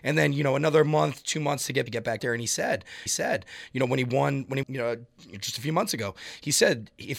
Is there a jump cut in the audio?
yes; 4 cuts; at 1.9 s, 2.2 s, 3.1 s, 4.6 s

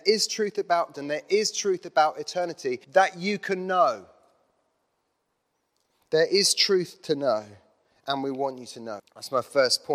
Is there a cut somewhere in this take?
yes; 3 cuts; at 0.9 s, 2.8 s, 9.0 s

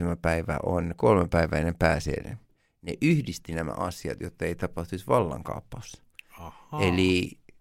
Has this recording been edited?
no; 0 cuts

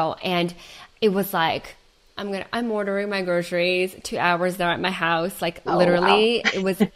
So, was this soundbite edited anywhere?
no; 0 cuts

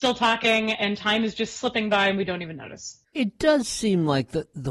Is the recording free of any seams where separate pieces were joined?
yes; 0 cuts

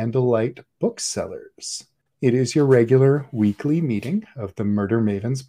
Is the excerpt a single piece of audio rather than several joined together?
no; 1 cut; at 2.1 s

